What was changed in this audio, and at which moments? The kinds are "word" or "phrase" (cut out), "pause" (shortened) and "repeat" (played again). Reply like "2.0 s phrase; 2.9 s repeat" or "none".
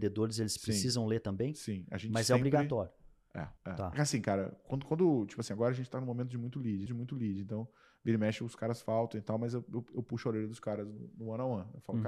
3.6 s pause; 6.9 s repeat